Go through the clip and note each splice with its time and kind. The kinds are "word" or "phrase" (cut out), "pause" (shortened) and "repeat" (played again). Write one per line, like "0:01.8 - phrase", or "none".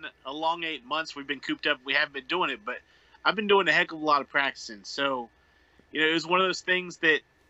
none